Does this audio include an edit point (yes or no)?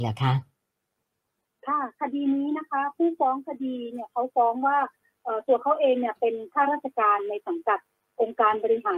no